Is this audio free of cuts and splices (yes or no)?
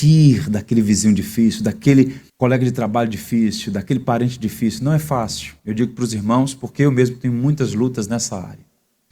no